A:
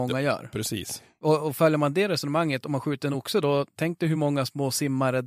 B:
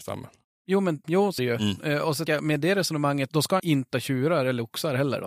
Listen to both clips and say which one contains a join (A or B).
B